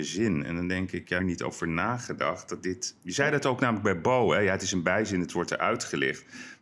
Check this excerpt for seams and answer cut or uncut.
cut